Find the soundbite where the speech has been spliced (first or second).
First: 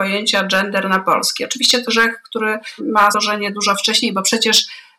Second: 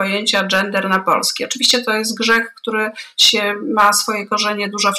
first